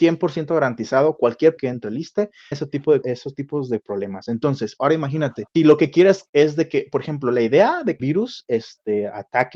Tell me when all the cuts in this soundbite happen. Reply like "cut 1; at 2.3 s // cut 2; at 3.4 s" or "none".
cut 1; at 1.6 s // cut 2; at 2.5 s // cut 3; at 3.0 s // cut 4; at 5.6 s // cut 5; at 6.3 s // cut 6; at 8.0 s